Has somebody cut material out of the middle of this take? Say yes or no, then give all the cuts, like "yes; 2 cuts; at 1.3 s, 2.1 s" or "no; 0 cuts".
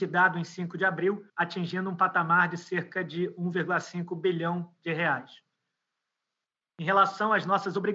yes; 1 cut; at 1.3 s